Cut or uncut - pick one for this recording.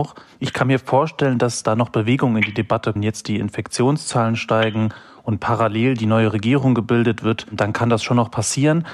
cut